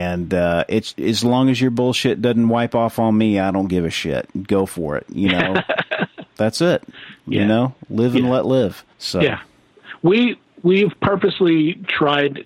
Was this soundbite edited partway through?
yes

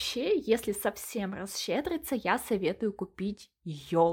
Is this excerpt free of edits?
yes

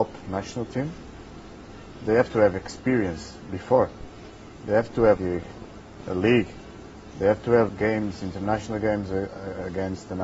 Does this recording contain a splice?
yes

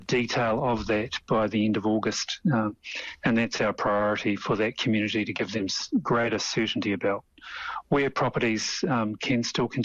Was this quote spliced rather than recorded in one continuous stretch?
no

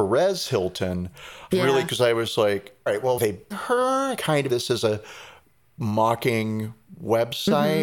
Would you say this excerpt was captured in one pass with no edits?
no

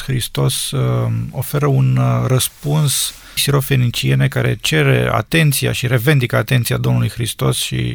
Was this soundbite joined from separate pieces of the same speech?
yes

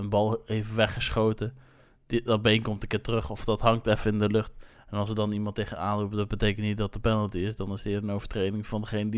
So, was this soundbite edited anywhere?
no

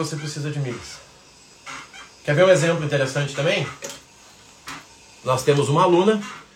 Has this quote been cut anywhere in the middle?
no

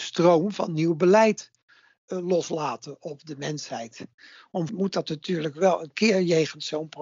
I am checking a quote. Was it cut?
yes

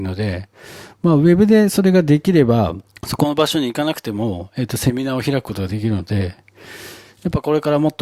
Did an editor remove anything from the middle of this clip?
yes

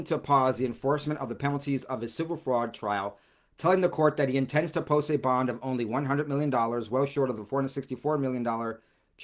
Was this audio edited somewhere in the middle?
no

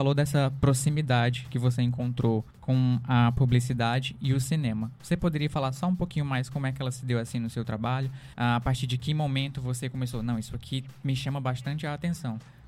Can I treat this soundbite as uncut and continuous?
no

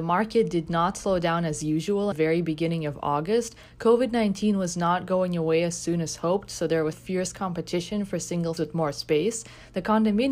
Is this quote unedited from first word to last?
no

